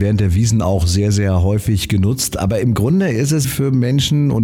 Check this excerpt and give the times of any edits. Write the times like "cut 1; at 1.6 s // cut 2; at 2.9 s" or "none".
cut 1; at 3.4 s